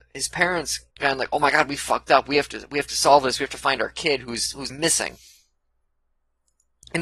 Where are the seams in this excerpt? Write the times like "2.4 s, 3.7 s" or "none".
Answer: 0.9 s, 4.7 s